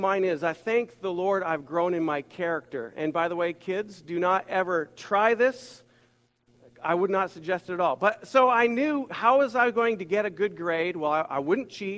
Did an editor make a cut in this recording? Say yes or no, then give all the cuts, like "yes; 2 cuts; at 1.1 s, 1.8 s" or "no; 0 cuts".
no; 0 cuts